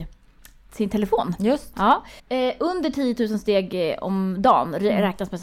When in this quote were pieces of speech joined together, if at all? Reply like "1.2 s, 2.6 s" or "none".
2.2 s